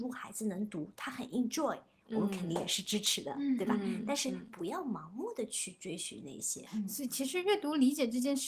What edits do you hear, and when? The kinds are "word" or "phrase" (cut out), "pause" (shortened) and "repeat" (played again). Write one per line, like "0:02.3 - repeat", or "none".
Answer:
none